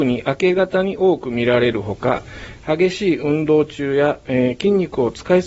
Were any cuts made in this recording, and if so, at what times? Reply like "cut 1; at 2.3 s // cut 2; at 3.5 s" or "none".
none